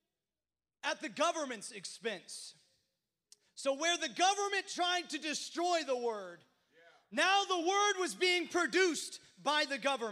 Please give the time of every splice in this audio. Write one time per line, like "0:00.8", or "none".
none